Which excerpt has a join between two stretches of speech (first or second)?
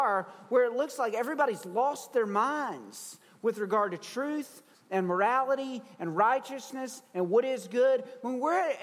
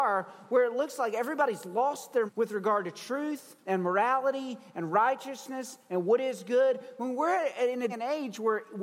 second